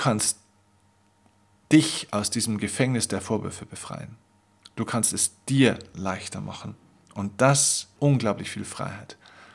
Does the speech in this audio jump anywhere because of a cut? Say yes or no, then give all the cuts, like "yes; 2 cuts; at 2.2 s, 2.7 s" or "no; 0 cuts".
yes; 1 cut; at 8.0 s